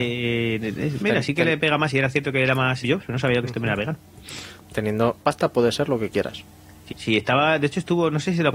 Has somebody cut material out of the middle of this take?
yes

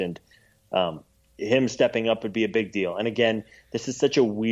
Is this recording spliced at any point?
no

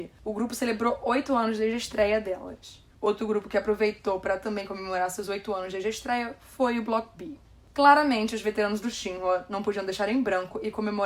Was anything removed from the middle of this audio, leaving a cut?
no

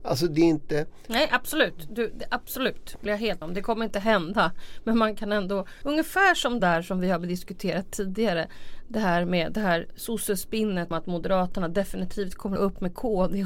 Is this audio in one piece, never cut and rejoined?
no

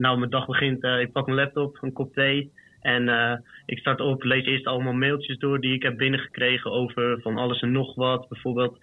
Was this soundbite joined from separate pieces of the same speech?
no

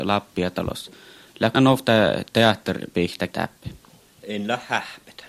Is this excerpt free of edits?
no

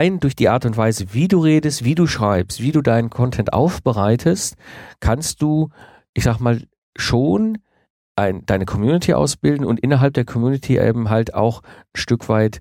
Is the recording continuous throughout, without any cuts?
yes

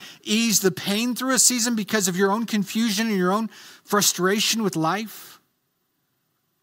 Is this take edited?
no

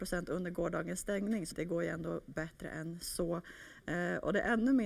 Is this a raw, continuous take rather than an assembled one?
no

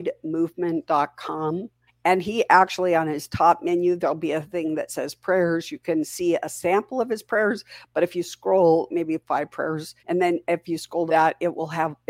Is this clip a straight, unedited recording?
no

